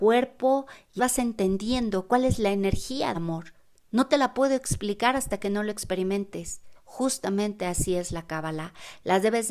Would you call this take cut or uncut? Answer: cut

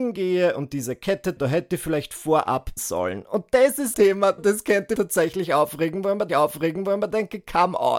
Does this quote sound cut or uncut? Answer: cut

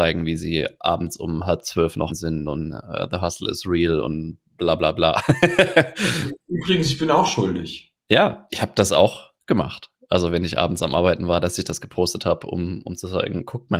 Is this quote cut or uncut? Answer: cut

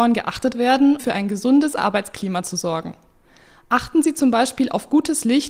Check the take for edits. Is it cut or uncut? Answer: cut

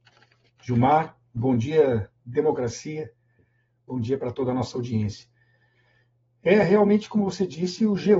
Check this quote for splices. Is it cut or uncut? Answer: uncut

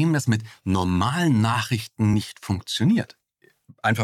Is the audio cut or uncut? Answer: uncut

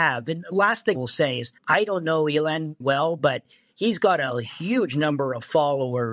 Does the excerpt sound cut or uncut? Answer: cut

